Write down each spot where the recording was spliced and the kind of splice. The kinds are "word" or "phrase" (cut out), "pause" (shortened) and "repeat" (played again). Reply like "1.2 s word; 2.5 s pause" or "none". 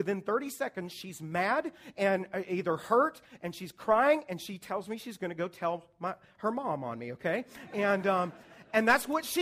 none